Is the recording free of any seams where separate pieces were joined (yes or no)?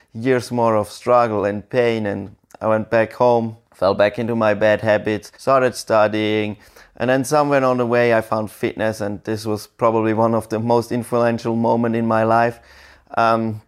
no